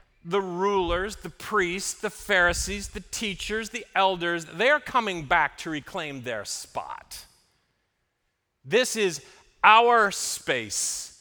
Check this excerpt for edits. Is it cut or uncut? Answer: uncut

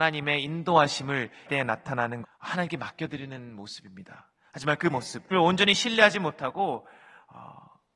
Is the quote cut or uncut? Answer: cut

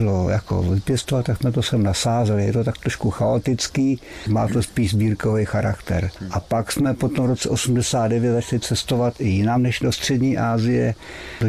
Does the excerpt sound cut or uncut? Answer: uncut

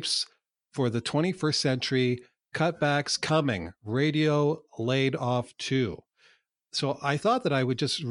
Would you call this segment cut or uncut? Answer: uncut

